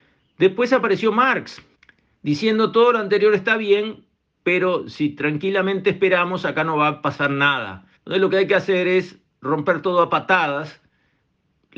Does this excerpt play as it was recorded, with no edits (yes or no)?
no